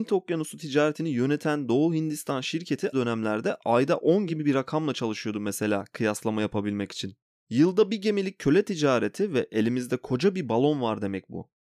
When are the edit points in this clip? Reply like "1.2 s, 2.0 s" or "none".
2.9 s, 4.3 s